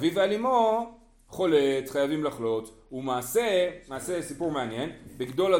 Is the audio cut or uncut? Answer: uncut